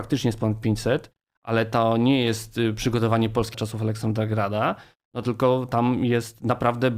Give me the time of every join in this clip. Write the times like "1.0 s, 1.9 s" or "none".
3.5 s